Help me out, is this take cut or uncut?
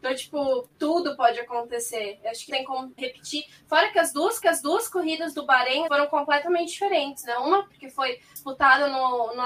cut